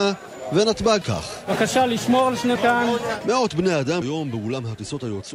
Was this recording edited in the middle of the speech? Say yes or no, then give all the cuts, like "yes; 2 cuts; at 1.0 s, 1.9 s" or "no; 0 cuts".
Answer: yes; 3 cuts; at 1.0 s, 2.6 s, 4.0 s